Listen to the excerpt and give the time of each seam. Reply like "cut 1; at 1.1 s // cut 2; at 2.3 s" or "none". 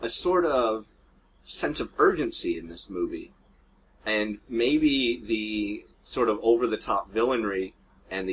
cut 1; at 5.9 s